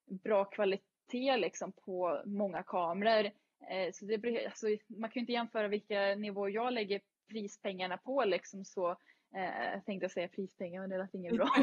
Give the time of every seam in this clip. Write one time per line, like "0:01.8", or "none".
none